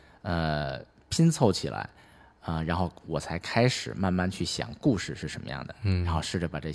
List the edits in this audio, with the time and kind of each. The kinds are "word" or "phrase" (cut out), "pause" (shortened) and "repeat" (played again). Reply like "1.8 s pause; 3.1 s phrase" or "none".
none